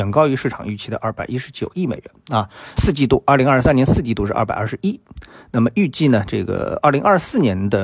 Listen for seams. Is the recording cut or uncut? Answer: cut